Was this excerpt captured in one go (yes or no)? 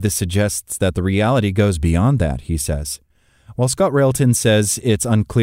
yes